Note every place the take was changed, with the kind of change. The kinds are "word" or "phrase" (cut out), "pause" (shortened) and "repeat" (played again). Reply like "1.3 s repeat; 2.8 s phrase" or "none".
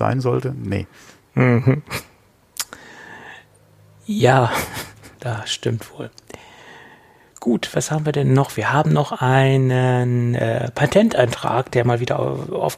5.1 s pause